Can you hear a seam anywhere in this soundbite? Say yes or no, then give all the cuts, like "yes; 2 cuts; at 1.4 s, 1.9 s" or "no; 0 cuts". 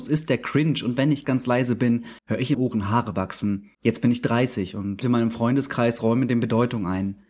yes; 5 cuts; at 1.2 s, 2.2 s, 2.5 s, 3.7 s, 5.0 s